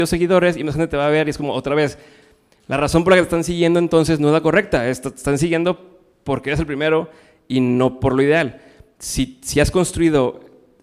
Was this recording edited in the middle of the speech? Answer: no; 0 cuts

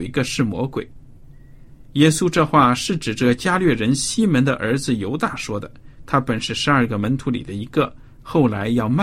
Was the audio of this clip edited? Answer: no; 0 cuts

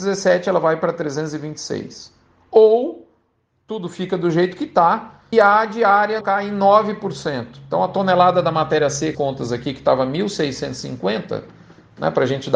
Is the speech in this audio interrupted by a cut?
yes; 3 cuts; at 5.3 s, 6.2 s, 9.1 s

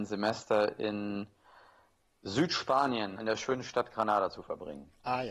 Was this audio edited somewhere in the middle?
yes; 1 cut; at 3.2 s

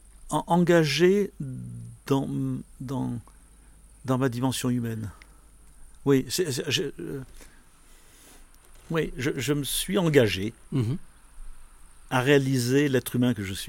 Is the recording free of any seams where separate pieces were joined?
yes; 0 cuts

